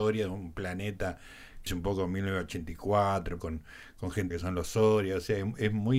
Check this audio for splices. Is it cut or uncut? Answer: cut